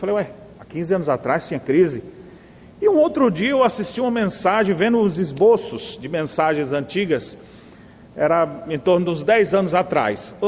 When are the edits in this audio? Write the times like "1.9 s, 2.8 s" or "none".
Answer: none